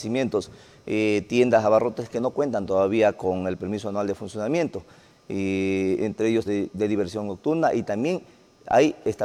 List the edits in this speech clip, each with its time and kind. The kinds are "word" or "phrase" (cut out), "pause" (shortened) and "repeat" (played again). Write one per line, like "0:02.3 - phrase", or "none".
0:06.4 - phrase